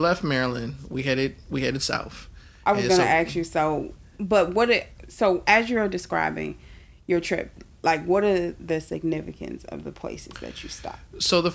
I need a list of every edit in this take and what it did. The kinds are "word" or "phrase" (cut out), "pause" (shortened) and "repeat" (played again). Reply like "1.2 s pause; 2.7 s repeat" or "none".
none